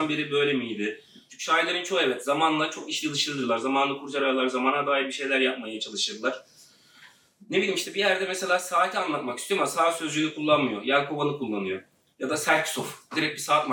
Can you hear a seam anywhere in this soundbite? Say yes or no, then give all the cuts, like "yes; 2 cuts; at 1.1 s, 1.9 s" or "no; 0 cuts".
no; 0 cuts